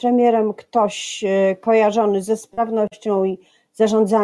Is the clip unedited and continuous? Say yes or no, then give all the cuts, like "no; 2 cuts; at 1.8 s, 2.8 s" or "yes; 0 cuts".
yes; 0 cuts